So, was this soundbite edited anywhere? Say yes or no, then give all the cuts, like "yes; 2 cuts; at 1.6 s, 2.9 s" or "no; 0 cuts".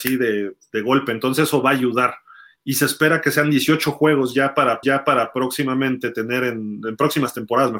yes; 1 cut; at 4.8 s